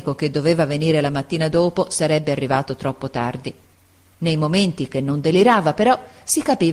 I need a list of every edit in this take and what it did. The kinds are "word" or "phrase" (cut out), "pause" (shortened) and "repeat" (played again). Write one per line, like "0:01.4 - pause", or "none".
none